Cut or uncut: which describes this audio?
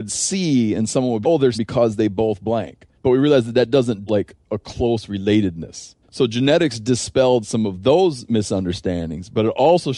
cut